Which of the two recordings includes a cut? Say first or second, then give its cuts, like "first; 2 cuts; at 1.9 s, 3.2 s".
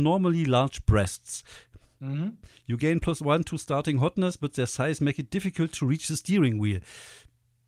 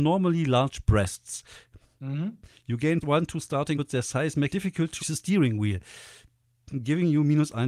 second; 4 cuts; at 3.0 s, 3.7 s, 4.5 s, 5.0 s